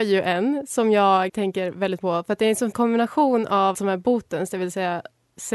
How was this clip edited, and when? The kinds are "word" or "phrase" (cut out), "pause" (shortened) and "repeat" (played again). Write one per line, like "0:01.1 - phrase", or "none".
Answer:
0:01.3 - word
0:02.0 - word
0:02.7 - word
0:03.7 - word

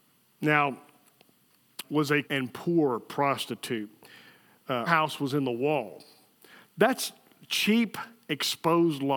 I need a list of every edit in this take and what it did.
0:01.8 - word
0:02.2 - word
0:04.9 - word

